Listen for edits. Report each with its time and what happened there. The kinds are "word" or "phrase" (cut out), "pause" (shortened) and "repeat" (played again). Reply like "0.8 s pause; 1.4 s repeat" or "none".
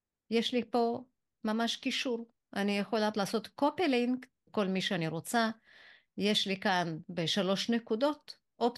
3.1 s word; 4.5 s phrase